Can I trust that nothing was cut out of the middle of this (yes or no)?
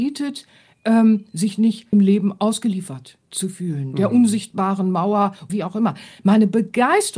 no